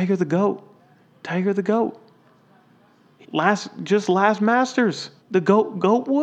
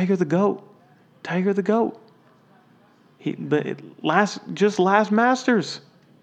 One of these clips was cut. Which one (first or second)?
first